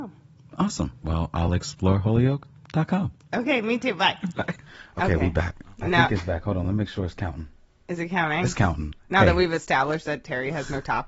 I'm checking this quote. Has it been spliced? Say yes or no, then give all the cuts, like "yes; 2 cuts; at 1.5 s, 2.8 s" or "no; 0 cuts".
no; 0 cuts